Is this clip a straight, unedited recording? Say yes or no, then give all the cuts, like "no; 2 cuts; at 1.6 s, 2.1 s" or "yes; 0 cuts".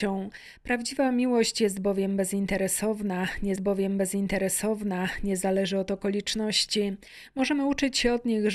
no; 1 cut; at 3.6 s